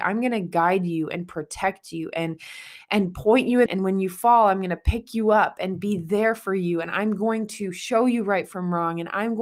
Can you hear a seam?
yes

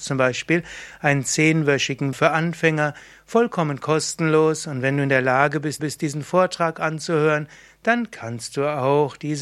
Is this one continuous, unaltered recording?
no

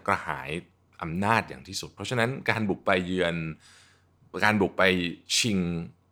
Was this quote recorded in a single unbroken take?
yes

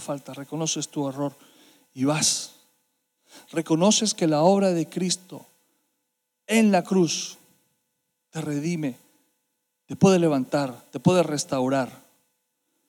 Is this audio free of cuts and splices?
yes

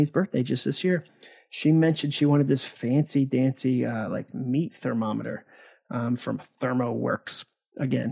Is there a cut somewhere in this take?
no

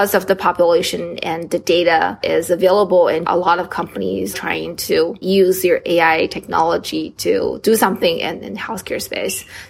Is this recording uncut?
no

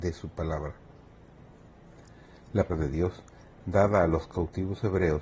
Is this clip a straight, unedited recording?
no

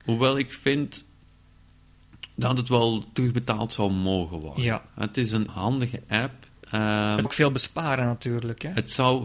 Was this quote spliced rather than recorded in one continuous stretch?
yes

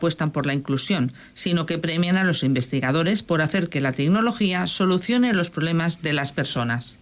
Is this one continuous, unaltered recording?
yes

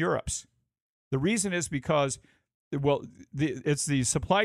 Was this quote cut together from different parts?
no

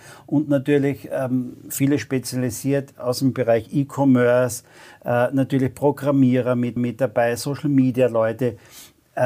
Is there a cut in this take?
yes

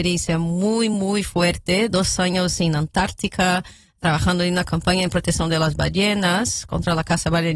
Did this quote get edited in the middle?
no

